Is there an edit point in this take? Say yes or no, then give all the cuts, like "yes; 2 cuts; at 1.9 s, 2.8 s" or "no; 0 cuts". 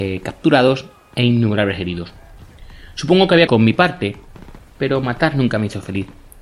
yes; 1 cut; at 3.5 s